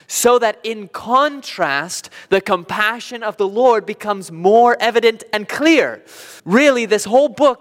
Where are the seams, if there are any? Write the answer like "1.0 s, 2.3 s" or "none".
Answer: 6.4 s